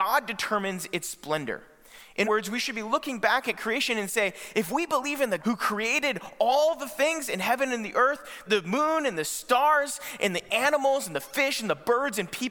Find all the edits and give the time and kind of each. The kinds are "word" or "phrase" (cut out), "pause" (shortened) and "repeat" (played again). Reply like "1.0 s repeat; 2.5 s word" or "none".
2.2 s word; 5.4 s word; 8.5 s word